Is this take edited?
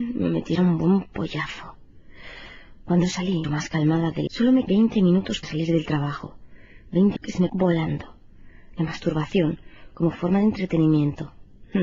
yes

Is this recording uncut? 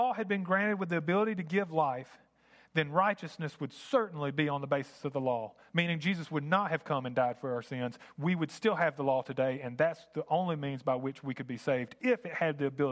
yes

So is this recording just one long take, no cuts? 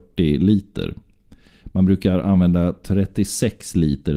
yes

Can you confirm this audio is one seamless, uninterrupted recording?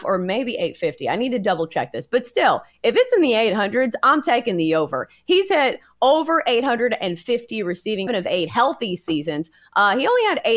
no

